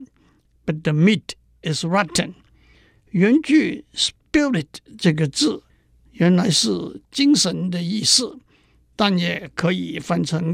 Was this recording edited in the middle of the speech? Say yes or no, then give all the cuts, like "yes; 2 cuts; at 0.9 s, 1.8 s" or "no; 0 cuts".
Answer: no; 0 cuts